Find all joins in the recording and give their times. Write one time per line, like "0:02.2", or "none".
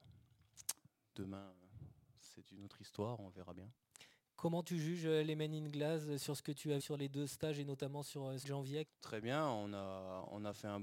0:06.8
0:08.4
0:08.8